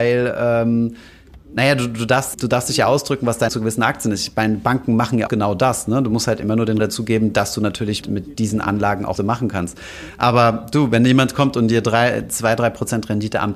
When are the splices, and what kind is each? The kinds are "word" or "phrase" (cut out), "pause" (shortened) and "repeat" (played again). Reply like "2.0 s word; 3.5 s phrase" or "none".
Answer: 2.3 s word; 3.5 s word; 5.3 s word; 6.8 s word; 8.0 s word; 9.2 s word

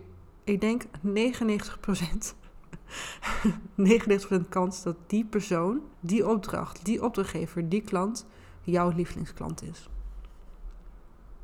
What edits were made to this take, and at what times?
5.9 s pause

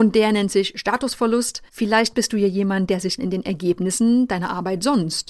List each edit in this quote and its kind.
1.7 s pause; 3.2 s word

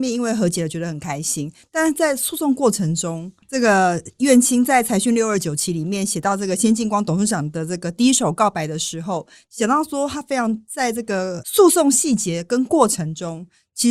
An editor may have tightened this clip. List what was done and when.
none

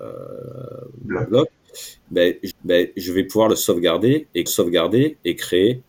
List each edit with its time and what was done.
2.5 s repeat; 4.5 s repeat

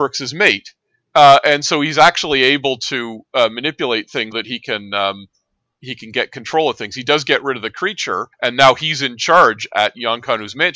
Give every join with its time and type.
4.3 s word; 8.3 s pause

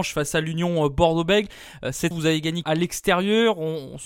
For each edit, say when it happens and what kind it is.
2.1 s word; 2.6 s phrase

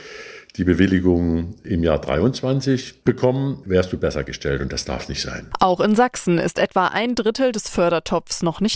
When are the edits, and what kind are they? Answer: 3.6 s word

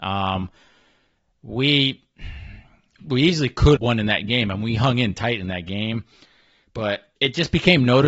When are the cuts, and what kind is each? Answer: 3.0 s word; 3.8 s word; 7.2 s pause

